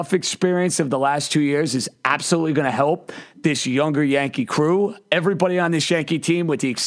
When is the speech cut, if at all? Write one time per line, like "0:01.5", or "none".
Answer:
none